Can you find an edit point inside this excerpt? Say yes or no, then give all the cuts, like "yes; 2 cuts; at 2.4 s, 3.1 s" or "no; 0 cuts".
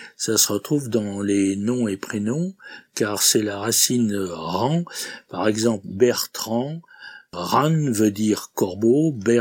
no; 0 cuts